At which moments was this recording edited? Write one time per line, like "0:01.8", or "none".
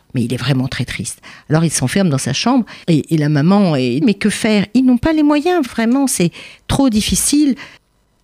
0:02.8
0:04.0
0:05.7